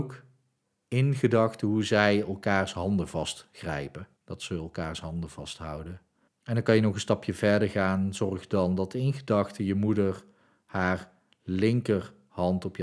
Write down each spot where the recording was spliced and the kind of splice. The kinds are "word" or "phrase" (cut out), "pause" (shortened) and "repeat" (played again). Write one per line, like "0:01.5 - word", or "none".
0:04.2 - pause
0:06.3 - pause